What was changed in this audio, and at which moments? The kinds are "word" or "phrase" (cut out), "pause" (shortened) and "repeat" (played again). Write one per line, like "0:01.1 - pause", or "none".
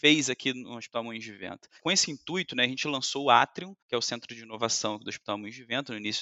0:01.8 - pause
0:03.8 - pause